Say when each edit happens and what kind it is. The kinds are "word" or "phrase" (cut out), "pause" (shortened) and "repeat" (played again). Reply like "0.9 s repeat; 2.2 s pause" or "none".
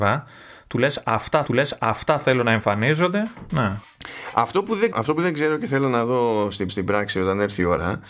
1.5 s repeat; 4.9 s word; 6.7 s repeat